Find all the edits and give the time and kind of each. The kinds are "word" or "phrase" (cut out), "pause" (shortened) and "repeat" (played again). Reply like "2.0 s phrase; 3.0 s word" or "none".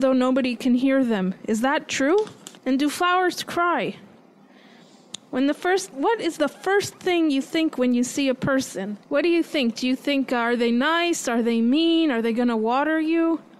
2.6 s pause; 9.0 s pause